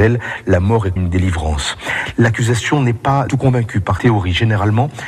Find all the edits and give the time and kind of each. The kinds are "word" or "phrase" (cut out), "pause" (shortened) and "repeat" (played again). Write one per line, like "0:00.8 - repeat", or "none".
0:01.0 - word
0:03.3 - word
0:04.0 - word